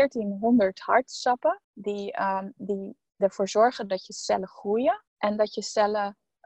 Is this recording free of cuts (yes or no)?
no